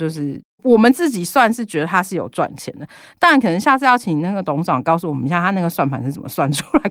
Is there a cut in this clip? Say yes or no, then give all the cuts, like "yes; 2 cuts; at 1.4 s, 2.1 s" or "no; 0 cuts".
no; 0 cuts